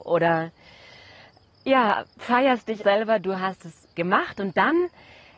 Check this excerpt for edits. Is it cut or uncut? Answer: cut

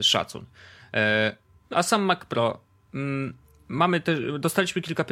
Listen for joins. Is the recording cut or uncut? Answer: cut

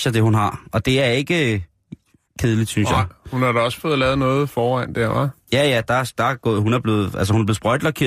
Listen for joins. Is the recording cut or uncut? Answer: uncut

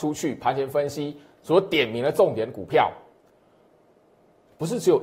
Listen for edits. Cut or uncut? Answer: uncut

